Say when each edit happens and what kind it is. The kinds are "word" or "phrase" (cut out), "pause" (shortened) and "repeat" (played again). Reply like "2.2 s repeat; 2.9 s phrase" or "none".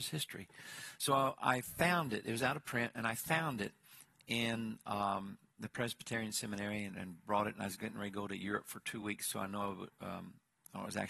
none